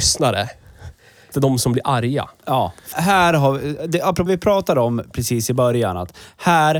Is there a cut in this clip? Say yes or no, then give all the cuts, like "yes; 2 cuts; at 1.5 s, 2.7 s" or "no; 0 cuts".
yes; 3 cuts; at 1.3 s, 2.9 s, 4.3 s